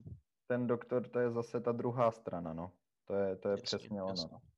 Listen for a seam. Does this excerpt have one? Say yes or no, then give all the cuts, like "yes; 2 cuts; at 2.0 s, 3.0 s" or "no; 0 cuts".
no; 0 cuts